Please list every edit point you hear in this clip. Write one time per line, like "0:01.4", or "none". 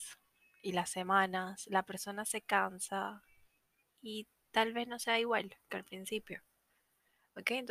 none